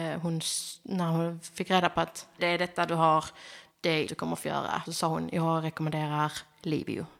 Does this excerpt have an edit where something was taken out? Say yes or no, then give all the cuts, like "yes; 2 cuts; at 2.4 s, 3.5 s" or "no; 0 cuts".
yes; 4 cuts; at 2.4 s, 3.7 s, 4.1 s, 4.9 s